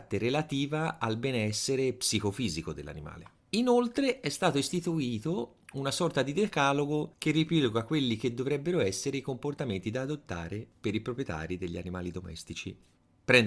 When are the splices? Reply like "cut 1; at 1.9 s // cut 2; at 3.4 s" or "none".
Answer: cut 1; at 3.4 s // cut 2; at 5.6 s // cut 3; at 7.1 s